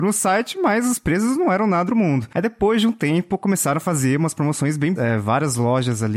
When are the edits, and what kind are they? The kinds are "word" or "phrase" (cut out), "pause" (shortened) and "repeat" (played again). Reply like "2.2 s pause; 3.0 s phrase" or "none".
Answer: 1.9 s phrase; 5.0 s word

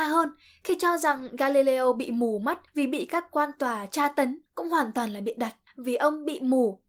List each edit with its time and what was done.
2.7 s pause; 4.5 s pause; 5.7 s pause

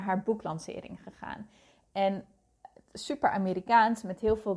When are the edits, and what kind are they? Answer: none

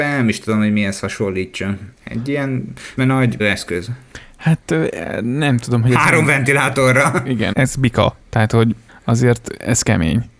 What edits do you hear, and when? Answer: 1.9 s pause; 3.0 s word; 3.4 s word; 7.5 s word; 8.2 s pause; 8.9 s pause

